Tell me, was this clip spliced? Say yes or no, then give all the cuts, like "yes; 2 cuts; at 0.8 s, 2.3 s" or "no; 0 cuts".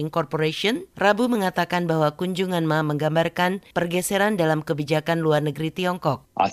no; 0 cuts